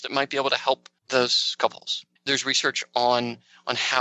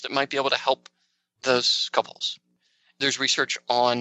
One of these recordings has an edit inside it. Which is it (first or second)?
first